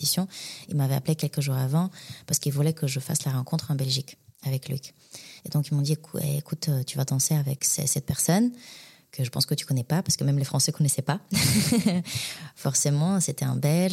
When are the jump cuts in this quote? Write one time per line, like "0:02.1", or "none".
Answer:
0:05.4